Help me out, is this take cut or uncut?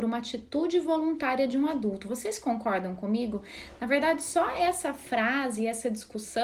uncut